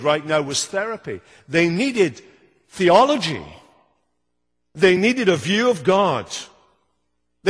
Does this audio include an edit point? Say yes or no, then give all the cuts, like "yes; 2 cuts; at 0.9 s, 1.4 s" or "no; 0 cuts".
no; 0 cuts